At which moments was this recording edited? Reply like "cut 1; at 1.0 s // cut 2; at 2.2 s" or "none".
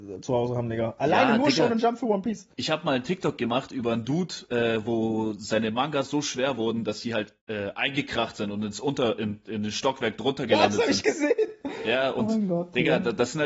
cut 1; at 2.5 s